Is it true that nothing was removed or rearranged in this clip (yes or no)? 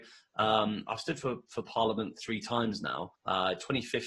no